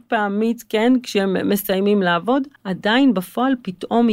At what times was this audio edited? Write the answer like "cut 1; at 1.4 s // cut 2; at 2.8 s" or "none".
cut 1; at 2.6 s

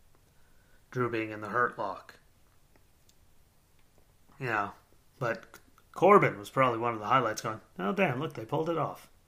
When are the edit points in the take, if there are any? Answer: none

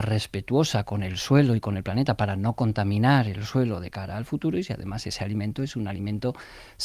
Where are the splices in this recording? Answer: none

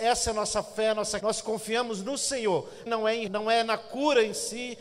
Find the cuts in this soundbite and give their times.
cut 1; at 1.2 s // cut 2; at 2.9 s // cut 3; at 3.3 s

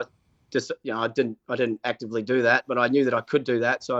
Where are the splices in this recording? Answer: none

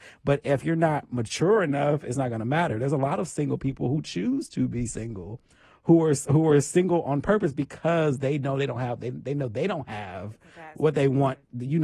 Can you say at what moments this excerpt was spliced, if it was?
none

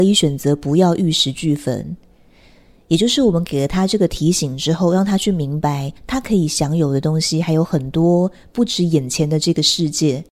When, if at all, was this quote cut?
cut 1; at 6.0 s

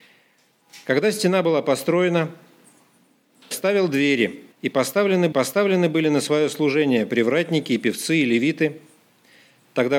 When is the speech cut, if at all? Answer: cut 1; at 3.5 s // cut 2; at 4.5 s // cut 3; at 5.3 s

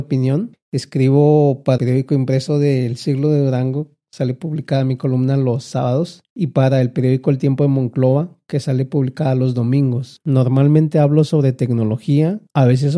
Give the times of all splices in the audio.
cut 1; at 1.8 s

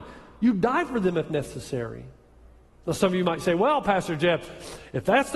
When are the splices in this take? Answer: none

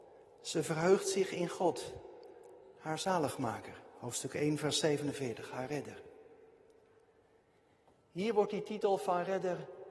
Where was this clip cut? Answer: none

